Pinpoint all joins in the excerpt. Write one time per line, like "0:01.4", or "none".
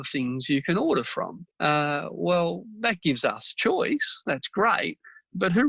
0:01.5